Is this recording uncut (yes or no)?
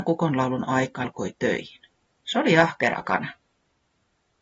no